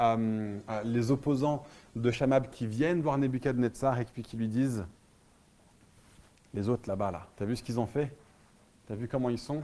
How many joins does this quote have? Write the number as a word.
one